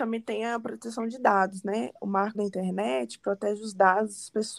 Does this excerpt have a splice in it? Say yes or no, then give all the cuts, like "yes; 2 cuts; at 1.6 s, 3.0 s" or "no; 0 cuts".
yes; 1 cut; at 2.3 s